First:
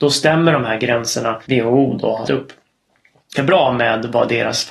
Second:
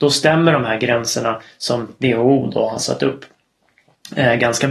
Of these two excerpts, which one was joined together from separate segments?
first; 3 cuts; at 1.4 s, 2.3 s, 3.4 s

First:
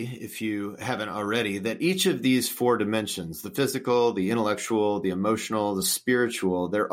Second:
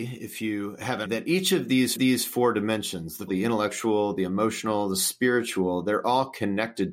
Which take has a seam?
second; 3 cuts; at 1.1 s, 2.0 s, 3.3 s

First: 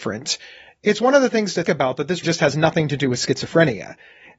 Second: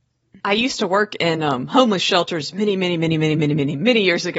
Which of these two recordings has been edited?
first; 2 cuts; at 1.6 s, 2.2 s

